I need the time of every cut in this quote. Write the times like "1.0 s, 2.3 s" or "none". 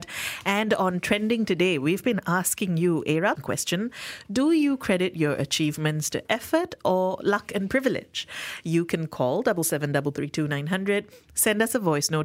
3.4 s

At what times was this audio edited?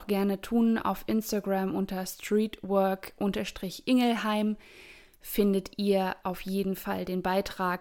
none

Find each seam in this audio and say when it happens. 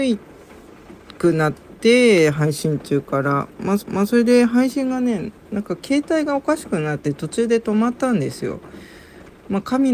3.8 s

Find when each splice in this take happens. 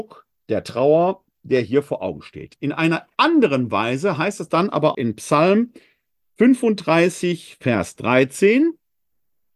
4.9 s

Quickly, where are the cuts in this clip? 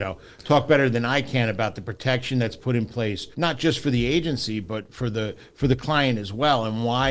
3.3 s

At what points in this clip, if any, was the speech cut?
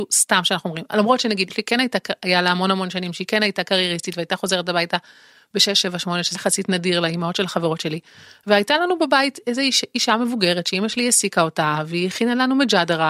1.5 s, 6.3 s

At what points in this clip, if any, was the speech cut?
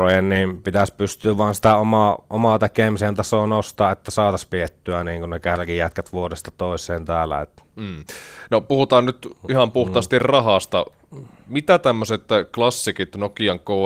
7.7 s

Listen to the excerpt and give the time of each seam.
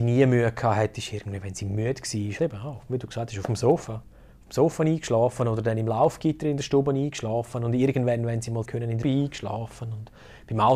2.4 s, 8.6 s, 9.0 s

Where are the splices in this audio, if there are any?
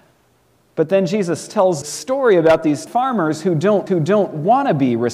1.8 s, 2.9 s, 3.9 s

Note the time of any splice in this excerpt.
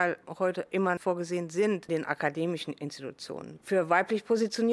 1.0 s, 1.9 s

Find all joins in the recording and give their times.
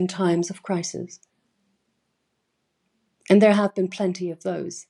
none

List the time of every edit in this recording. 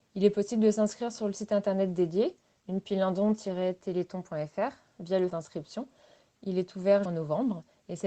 5.3 s, 7.1 s

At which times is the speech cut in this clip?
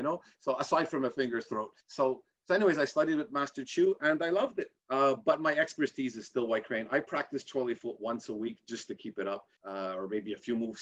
1.8 s, 4.8 s, 9.6 s

